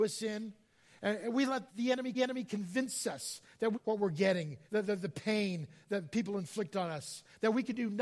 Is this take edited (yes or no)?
yes